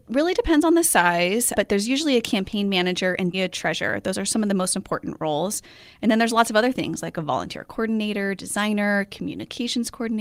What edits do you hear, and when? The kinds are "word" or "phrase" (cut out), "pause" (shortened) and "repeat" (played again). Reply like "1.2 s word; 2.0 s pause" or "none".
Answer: 1.6 s word; 3.3 s word